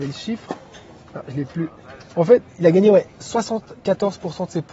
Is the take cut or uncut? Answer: uncut